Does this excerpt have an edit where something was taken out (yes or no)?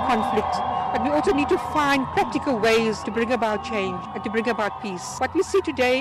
no